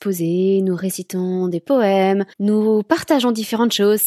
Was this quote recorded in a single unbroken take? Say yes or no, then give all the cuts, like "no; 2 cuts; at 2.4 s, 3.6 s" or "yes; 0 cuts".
no; 1 cut; at 2.3 s